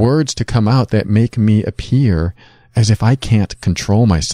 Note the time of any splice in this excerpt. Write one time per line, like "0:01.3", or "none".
none

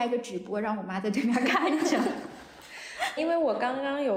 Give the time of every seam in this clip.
0:03.2

